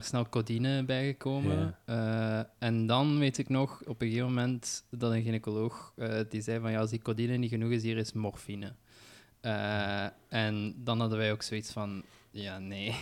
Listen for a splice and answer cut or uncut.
uncut